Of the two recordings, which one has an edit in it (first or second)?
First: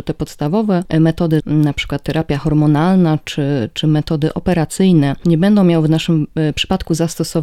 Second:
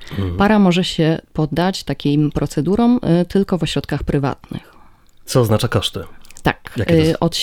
first